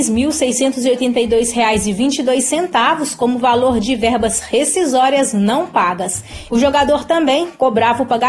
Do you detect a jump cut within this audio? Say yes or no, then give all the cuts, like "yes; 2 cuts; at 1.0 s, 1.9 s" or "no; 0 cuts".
no; 0 cuts